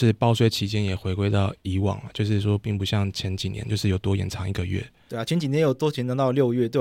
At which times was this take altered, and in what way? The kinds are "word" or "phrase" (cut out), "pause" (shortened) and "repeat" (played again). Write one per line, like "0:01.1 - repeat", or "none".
0:01.6 - pause